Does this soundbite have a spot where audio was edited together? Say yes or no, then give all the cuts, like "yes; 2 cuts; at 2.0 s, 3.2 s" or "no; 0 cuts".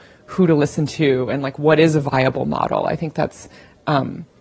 no; 0 cuts